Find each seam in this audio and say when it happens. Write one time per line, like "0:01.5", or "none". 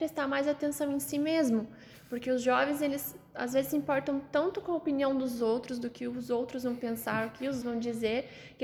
0:07.6